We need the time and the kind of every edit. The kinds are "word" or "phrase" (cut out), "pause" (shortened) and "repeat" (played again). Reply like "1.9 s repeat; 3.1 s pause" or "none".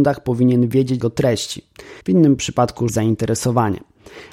1.0 s phrase; 2.0 s pause; 2.9 s phrase